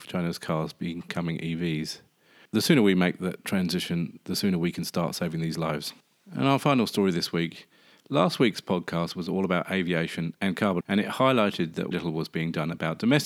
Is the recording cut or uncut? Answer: cut